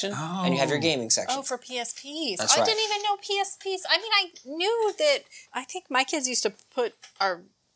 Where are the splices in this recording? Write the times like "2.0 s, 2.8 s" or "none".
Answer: 5.4 s